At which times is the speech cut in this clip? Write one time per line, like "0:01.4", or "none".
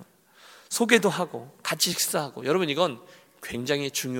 none